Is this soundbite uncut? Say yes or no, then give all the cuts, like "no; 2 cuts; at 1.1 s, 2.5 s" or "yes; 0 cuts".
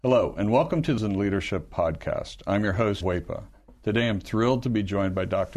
no; 2 cuts; at 1.0 s, 3.0 s